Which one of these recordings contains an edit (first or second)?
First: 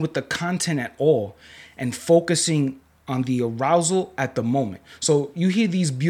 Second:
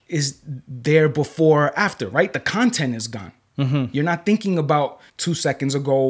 second